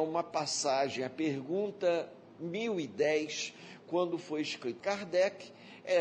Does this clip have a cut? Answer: yes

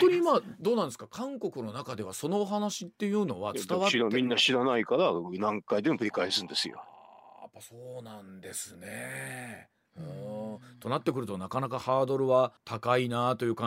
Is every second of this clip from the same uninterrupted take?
no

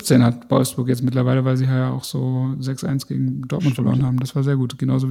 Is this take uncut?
yes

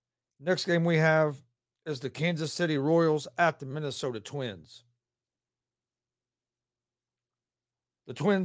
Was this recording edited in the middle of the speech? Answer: no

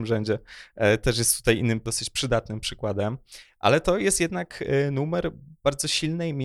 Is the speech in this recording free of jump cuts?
yes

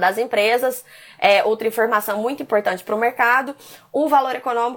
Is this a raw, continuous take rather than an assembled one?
yes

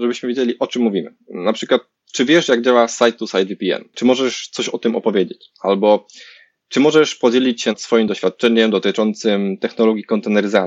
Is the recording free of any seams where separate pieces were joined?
yes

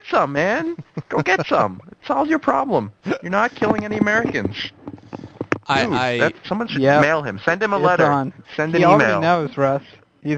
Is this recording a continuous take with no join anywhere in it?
no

